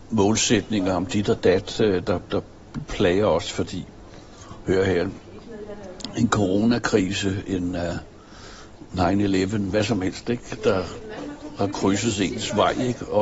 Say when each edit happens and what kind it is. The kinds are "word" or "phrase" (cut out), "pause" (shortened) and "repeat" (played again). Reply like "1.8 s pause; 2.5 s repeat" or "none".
none